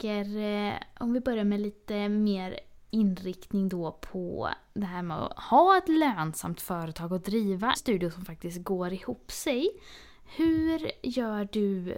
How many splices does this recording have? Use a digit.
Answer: 1